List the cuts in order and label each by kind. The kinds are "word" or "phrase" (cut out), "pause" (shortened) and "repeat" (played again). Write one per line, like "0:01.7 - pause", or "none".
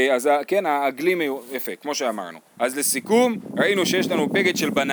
0:02.5 - pause